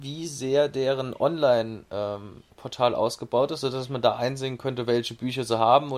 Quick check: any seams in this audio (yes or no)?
yes